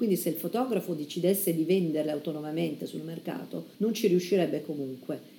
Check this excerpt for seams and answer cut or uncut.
cut